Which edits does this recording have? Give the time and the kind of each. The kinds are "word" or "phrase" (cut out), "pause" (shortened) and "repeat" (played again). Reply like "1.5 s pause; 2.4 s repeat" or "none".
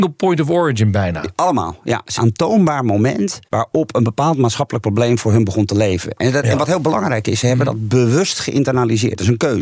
2.2 s phrase; 3.5 s pause